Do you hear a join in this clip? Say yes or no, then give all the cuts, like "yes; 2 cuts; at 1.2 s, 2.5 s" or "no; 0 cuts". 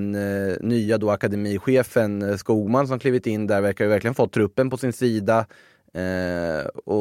no; 0 cuts